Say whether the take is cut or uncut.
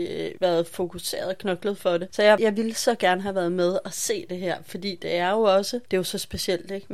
uncut